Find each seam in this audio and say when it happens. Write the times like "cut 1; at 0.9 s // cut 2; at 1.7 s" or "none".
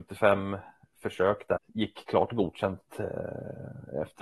cut 1; at 1.6 s